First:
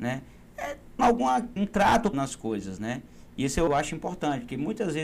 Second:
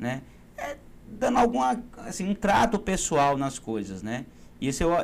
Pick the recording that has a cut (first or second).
first